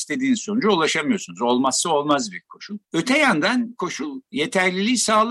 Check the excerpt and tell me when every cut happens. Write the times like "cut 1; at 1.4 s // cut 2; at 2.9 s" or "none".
cut 1; at 2.8 s // cut 2; at 3.8 s